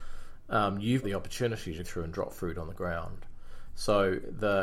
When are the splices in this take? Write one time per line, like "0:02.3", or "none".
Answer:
0:01.0
0:01.8